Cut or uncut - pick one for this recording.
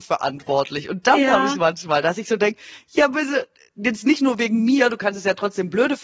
uncut